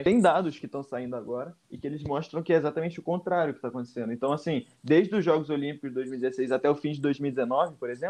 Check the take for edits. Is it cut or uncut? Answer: cut